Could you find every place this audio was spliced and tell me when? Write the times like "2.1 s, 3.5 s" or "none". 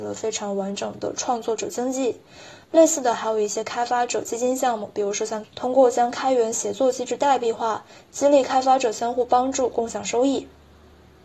5.4 s